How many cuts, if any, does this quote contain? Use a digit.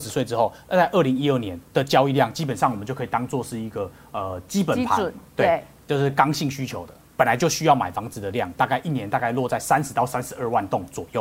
1